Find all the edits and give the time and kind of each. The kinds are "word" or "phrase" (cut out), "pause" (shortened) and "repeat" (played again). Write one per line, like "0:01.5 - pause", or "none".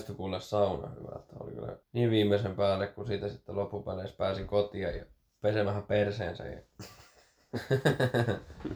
0:01.8 - pause